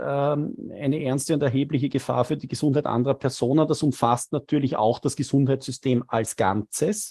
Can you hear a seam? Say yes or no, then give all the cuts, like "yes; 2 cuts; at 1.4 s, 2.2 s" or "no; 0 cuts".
no; 0 cuts